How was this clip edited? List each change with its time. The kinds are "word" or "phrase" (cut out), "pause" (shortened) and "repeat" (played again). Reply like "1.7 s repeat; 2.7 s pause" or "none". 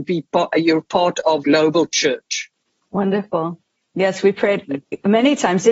1.4 s word; 2.7 s pause

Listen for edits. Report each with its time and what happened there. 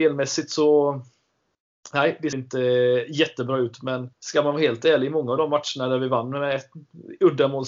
2.3 s word; 4.1 s pause

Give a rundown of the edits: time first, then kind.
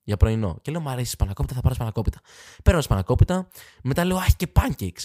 none

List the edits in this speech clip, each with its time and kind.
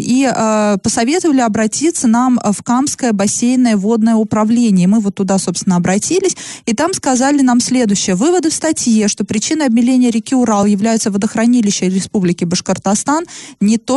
none

